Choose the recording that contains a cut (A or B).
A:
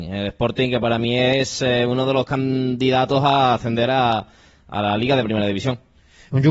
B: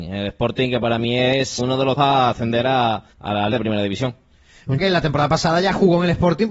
B